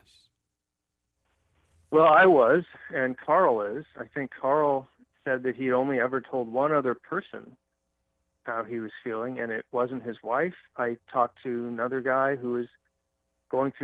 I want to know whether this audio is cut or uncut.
uncut